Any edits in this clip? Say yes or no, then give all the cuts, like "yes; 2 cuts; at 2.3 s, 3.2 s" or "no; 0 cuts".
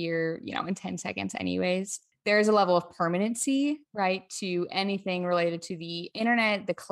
no; 0 cuts